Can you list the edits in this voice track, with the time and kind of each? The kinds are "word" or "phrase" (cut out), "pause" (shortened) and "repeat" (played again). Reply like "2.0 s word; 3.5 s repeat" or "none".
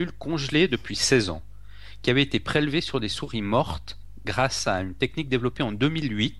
none